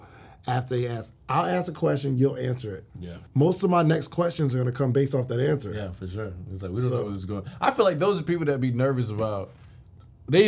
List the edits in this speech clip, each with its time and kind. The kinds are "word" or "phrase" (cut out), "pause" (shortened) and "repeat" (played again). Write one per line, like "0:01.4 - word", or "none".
0:03.3 - pause